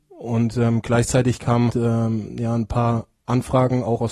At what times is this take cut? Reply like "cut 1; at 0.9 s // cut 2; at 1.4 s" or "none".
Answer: cut 1; at 1.7 s